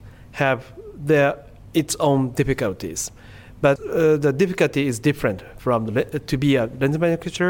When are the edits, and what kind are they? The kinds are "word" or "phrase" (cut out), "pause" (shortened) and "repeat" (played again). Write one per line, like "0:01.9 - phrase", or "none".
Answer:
none